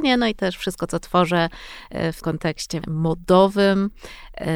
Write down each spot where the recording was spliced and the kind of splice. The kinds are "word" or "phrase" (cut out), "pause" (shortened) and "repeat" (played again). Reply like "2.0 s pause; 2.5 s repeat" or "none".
2.2 s word; 2.8 s word